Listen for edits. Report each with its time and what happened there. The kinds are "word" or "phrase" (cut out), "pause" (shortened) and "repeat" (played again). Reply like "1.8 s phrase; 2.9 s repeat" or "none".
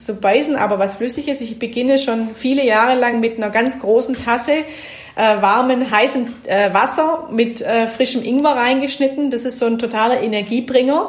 none